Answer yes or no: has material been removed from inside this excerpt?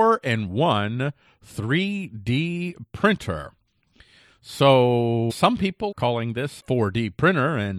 yes